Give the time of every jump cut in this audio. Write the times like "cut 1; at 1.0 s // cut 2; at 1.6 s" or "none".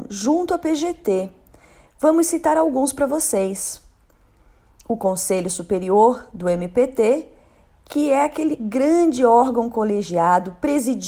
none